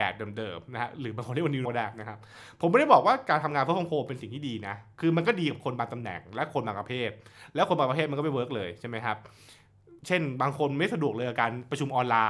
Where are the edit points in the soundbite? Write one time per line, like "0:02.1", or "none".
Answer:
0:01.6
0:10.0

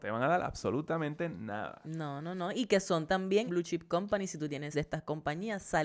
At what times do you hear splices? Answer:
0:03.5
0:04.7

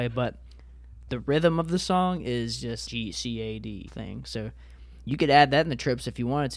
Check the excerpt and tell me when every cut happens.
0:02.9
0:03.9

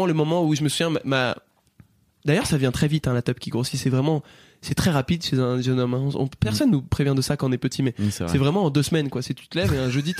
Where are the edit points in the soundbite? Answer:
none

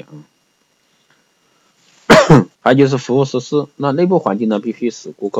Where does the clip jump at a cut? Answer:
0:02.5

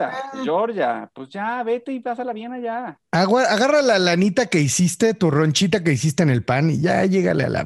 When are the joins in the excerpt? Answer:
0:03.0

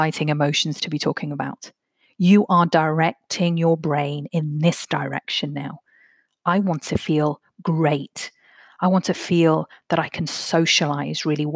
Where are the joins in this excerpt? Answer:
none

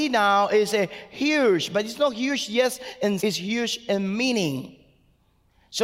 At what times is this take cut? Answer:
0:03.2

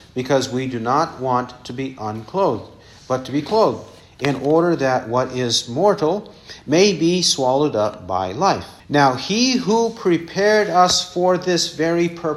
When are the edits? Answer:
0:08.8

